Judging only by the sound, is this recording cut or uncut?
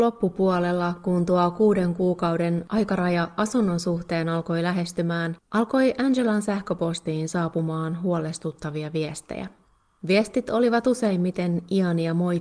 uncut